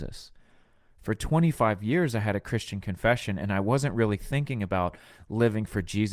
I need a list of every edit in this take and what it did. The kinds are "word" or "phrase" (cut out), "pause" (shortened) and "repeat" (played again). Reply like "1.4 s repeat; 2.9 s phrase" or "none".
none